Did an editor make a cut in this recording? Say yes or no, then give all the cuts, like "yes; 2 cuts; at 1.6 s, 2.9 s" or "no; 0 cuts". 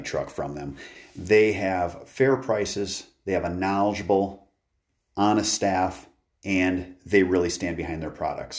no; 0 cuts